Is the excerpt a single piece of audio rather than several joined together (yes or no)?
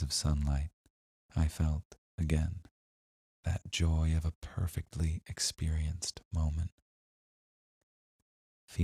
no